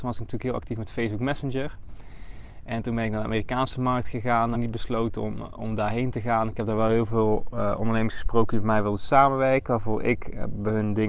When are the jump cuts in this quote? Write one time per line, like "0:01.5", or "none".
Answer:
0:04.5